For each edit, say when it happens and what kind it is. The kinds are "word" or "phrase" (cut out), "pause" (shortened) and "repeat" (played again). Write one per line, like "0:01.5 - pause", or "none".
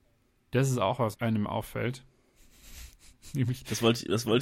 0:01.1 - word